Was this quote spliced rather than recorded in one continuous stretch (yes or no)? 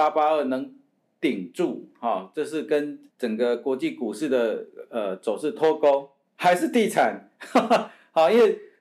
yes